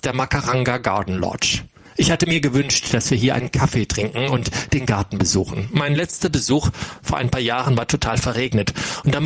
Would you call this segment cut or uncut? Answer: uncut